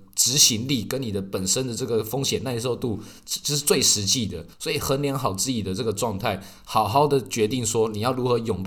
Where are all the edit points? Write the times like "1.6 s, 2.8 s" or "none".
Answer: 4.5 s